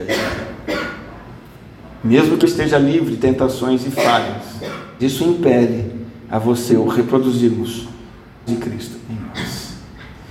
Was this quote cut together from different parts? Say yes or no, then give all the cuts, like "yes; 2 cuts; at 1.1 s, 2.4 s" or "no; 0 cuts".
yes; 5 cuts; at 2.4 s, 3.2 s, 5.0 s, 6.7 s, 8.5 s